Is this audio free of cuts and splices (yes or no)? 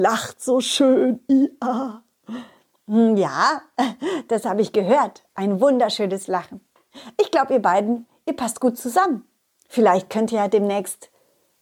yes